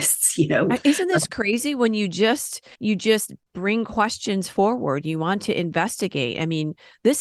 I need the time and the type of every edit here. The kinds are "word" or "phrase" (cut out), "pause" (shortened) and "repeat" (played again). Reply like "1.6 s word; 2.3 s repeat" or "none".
2.7 s pause